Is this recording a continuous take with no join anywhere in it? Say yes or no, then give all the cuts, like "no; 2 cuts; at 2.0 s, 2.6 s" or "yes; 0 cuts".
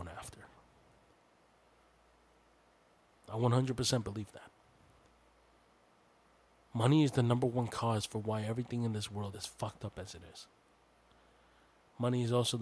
no; 1 cut; at 9.3 s